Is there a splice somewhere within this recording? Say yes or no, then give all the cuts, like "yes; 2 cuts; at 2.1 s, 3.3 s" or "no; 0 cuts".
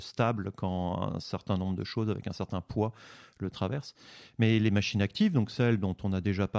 no; 0 cuts